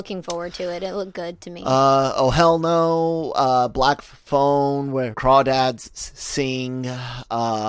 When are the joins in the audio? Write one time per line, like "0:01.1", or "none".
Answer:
0:05.1